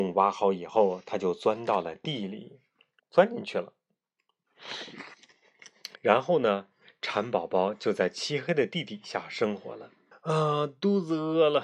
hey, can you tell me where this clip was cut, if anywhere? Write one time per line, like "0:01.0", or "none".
0:03.0
0:06.0
0:10.1